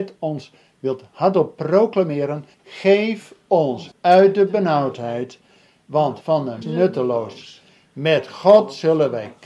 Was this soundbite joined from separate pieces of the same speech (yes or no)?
yes